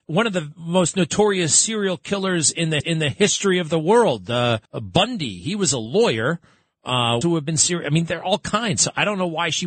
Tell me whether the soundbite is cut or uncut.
cut